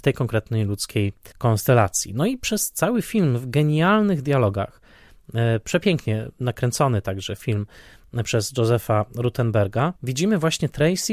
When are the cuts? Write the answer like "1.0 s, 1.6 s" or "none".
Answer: 1.3 s, 10.0 s